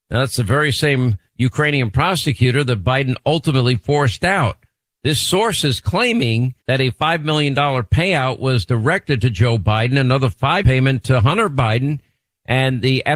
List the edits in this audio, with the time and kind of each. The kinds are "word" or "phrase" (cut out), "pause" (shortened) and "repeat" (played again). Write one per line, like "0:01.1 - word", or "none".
0:06.6 - pause
0:10.6 - word

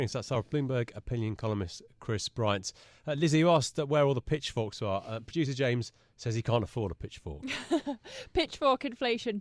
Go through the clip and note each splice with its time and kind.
none

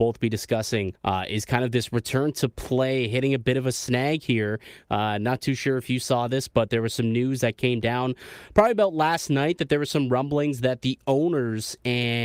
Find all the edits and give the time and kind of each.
0:01.0 - pause

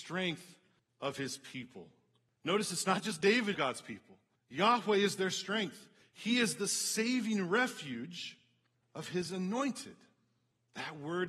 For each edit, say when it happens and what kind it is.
0:03.5 - phrase

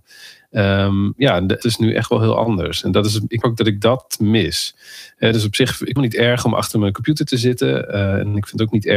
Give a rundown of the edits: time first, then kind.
0:01.6 - phrase
0:03.4 - word
0:06.0 - word

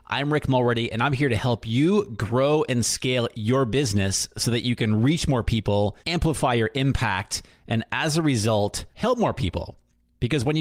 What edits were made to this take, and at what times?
0:06.0 - pause
0:08.9 - pause

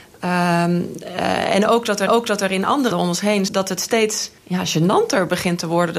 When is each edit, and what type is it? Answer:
0:02.1 - repeat
0:02.9 - word
0:03.5 - phrase
0:04.4 - pause

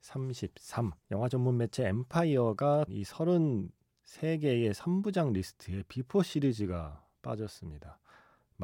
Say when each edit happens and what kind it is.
0:01.0 - pause
0:02.9 - phrase

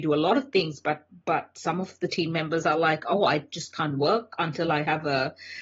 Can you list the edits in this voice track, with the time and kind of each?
none

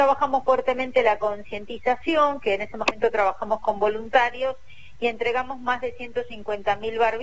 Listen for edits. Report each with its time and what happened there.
none

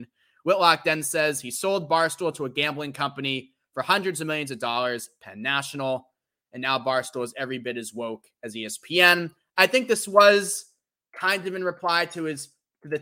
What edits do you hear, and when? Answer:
none

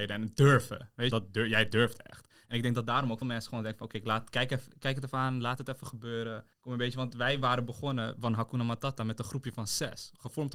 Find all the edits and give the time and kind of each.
0:01.1 - phrase
0:03.2 - word
0:06.5 - pause

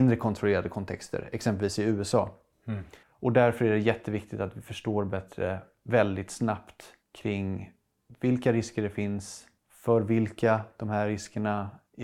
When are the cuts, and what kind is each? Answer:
0:03.0 - pause
0:07.0 - pause
0:09.6 - pause

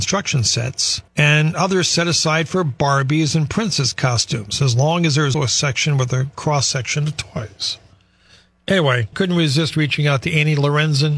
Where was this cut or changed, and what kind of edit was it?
0:01.1 - pause
0:05.3 - word
0:09.1 - word

